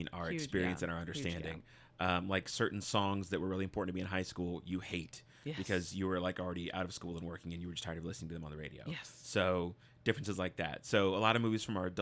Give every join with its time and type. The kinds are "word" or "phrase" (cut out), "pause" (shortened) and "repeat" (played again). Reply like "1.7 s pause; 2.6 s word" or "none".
none